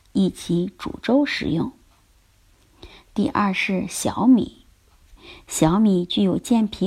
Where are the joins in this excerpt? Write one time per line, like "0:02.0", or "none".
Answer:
none